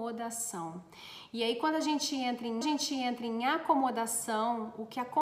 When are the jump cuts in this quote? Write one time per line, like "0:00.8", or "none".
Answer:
0:02.6